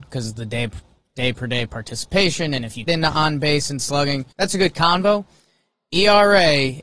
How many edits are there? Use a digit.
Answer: 2